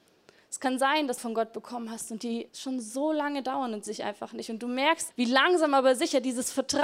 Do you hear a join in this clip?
yes; 4 cuts; at 1.2 s, 2.5 s, 3.9 s, 5.1 s

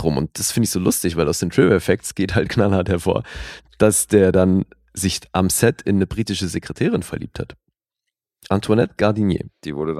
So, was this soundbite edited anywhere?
no; 0 cuts

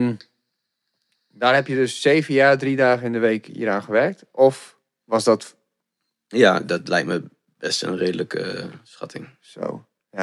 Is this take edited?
no; 0 cuts

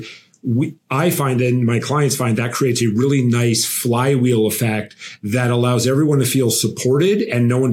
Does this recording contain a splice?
no; 0 cuts

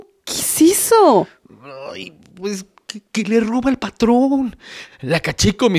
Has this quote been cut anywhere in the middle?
no; 0 cuts

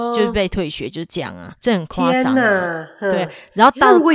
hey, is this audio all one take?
no; 1 cut; at 1.6 s

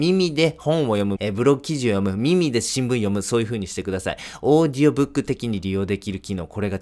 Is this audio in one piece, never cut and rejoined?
no; 1 cut; at 1.2 s

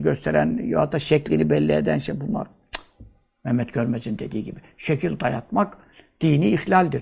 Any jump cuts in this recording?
no; 0 cuts

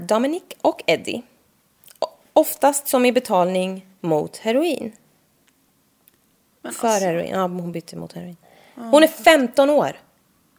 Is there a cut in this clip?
no; 0 cuts

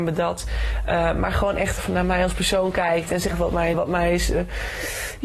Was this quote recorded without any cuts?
no; 2 cuts; at 3.3 s, 3.7 s

